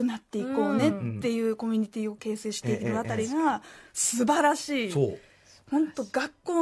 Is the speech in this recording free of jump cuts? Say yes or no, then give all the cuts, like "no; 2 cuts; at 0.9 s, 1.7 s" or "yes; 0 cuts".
yes; 0 cuts